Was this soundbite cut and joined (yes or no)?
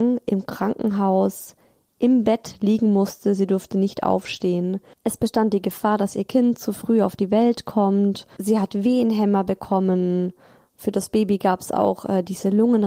no